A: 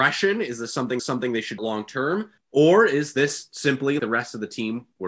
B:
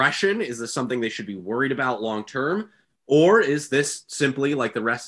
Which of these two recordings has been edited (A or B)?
A